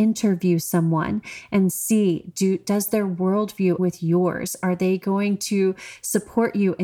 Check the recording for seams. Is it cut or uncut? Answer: cut